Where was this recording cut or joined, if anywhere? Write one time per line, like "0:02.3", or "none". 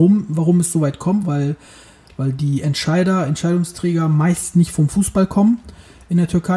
none